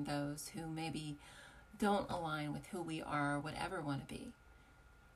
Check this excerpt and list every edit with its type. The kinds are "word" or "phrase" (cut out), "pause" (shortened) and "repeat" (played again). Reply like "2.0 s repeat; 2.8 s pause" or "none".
none